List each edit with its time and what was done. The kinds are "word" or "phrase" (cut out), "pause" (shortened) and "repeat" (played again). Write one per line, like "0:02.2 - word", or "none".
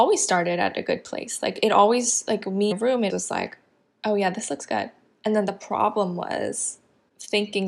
0:02.7 - phrase
0:03.1 - word

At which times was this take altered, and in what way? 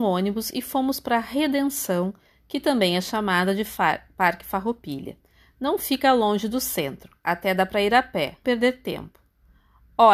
0:08.4 - phrase

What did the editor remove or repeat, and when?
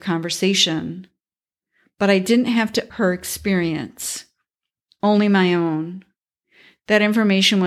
0:02.9 - word

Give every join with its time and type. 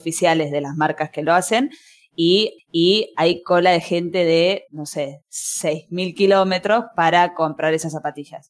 0:02.6 - repeat
0:04.7 - pause

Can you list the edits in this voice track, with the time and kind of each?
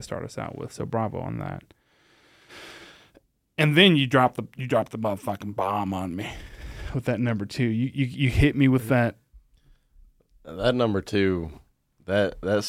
none

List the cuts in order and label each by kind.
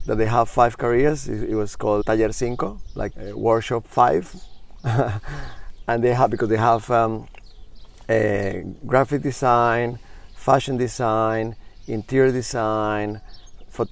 0:02.0 - word
0:03.1 - word

